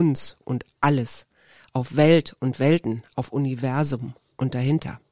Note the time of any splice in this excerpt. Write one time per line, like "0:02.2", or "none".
none